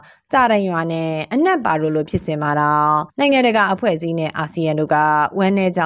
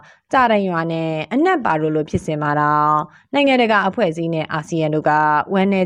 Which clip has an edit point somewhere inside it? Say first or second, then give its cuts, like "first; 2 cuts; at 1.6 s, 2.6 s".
first; 1 cut; at 3.1 s